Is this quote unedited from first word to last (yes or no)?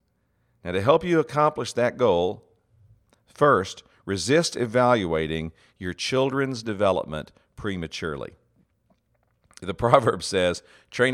yes